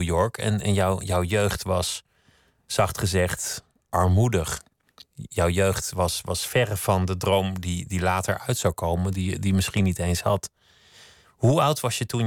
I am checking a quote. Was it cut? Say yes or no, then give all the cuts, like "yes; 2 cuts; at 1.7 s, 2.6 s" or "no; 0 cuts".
no; 0 cuts